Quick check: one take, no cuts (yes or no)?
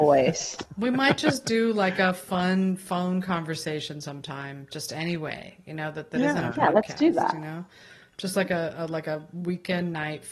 yes